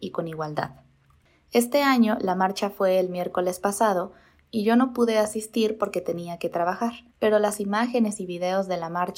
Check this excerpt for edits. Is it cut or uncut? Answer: cut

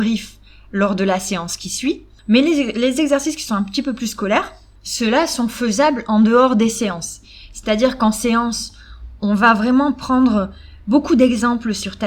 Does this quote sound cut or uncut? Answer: uncut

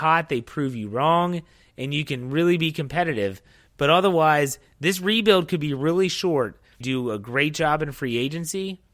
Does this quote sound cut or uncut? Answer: cut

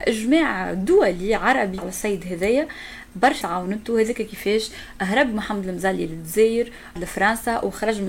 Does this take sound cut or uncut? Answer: cut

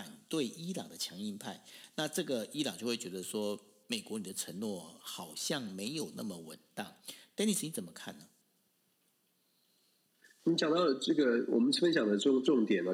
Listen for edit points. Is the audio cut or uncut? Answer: uncut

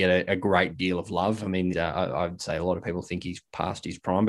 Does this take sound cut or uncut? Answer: cut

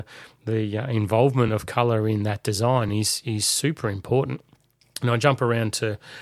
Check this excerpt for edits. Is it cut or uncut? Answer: uncut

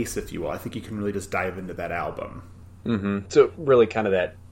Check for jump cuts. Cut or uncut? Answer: uncut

